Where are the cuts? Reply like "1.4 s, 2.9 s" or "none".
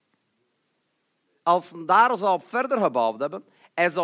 none